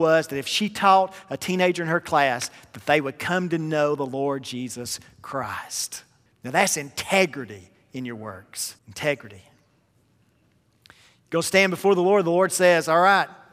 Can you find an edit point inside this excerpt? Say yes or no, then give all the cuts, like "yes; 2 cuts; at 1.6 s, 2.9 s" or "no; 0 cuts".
yes; 2 cuts; at 6.3 s, 8.8 s